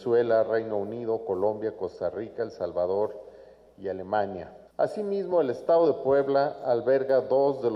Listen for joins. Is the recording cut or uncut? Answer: uncut